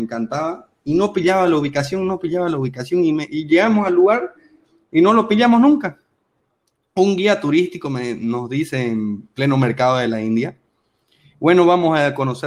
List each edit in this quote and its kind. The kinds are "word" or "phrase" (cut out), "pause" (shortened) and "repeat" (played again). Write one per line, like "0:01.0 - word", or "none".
none

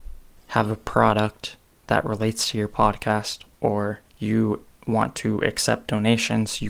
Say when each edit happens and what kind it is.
0:04.1 - pause

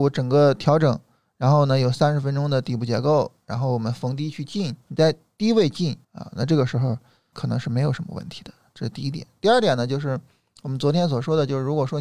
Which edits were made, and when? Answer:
0:04.8 - pause
0:06.0 - pause
0:07.3 - word

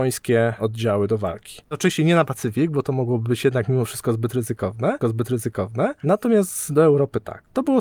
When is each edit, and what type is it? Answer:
0:05.0 - repeat

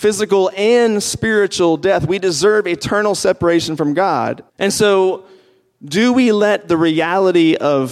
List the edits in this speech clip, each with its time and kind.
0:04.5 - pause

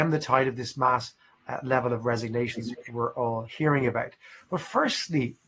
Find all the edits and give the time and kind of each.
none

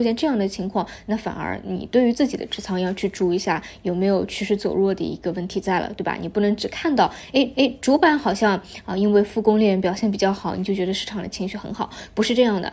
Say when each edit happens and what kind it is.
0:07.5 - repeat

